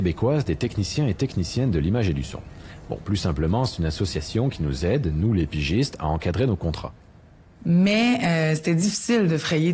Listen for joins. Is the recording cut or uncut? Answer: uncut